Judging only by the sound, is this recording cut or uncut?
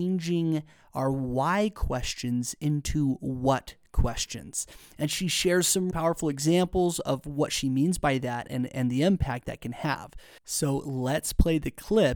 cut